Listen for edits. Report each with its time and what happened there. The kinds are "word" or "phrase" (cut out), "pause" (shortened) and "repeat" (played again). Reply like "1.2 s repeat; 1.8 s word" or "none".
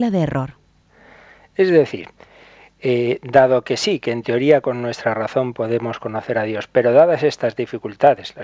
none